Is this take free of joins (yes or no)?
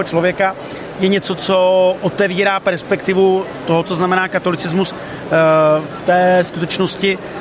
yes